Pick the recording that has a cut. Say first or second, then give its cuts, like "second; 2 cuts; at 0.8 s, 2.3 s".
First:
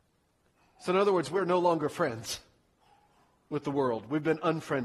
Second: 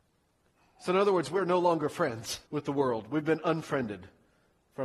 second; 1 cut; at 2.5 s